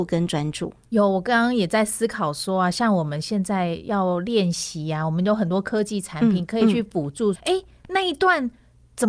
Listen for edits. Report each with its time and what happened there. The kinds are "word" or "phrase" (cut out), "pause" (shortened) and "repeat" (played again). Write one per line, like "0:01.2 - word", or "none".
0:07.4 - word